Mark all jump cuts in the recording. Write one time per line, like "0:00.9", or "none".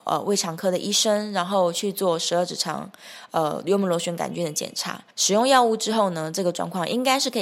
0:05.1

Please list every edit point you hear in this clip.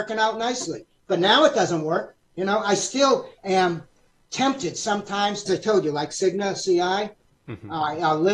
0:02.2
0:03.4
0:05.5

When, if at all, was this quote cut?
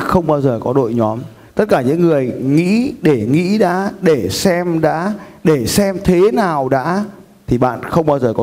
none

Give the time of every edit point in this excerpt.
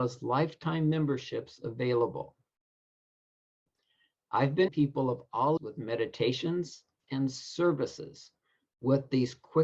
0:04.7
0:05.6
0:07.0

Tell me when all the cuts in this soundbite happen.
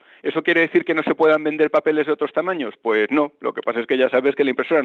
none

